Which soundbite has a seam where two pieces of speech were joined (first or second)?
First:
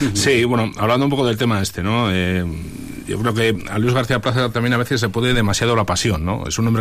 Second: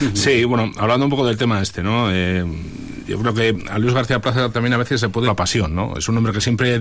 second